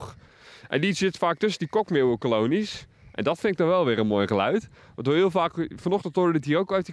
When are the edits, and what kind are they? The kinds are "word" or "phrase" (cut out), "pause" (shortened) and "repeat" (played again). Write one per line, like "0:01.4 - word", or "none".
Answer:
none